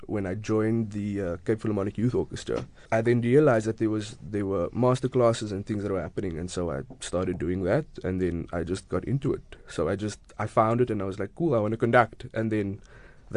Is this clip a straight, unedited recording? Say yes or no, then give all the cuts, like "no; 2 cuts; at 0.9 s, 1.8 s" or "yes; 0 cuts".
no; 1 cut; at 2.9 s